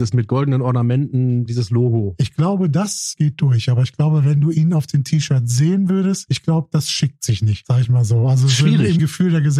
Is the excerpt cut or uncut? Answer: uncut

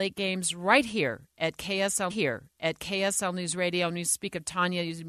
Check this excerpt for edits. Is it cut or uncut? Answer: cut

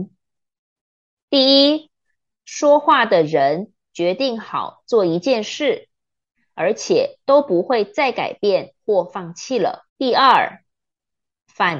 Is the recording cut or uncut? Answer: cut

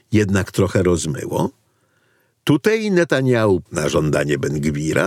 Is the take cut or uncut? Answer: cut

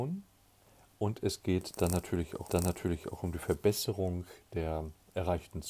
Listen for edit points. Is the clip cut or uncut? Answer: cut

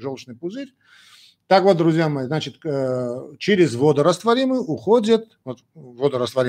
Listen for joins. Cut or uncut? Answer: cut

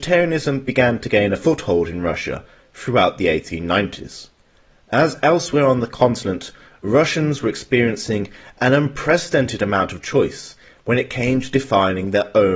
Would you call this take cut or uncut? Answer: uncut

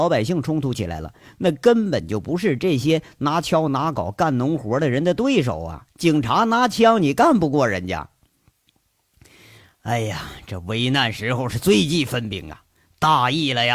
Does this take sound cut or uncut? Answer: uncut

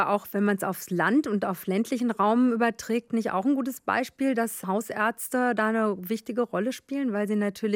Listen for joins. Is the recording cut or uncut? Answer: uncut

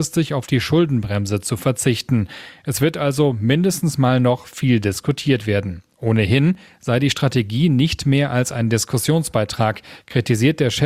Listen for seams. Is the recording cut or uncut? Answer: uncut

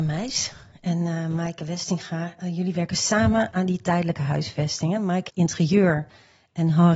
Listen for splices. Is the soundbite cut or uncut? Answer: cut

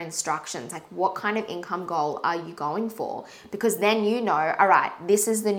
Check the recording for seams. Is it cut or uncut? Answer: uncut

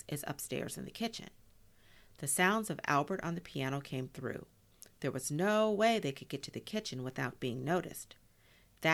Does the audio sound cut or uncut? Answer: uncut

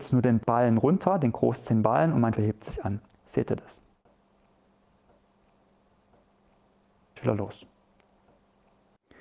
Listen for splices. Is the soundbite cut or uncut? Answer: cut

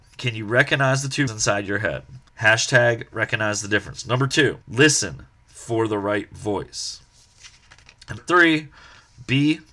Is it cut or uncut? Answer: cut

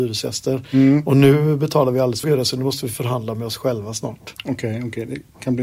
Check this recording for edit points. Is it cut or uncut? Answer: cut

